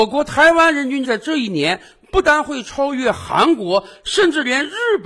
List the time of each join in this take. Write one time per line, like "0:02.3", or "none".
0:01.0